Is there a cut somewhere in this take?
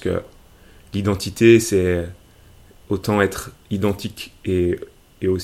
no; 0 cuts

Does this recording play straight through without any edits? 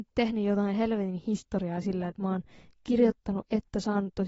yes; 0 cuts

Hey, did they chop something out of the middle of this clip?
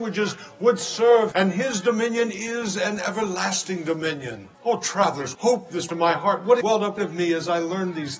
yes; 6 cuts; at 1.3 s, 4.5 s, 5.3 s, 5.9 s, 6.6 s, 7.0 s

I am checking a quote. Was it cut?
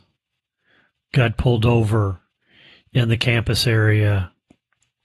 no; 0 cuts

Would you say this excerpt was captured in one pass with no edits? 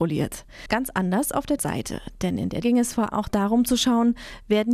no; 3 cuts; at 1.6 s, 2.6 s, 3.1 s

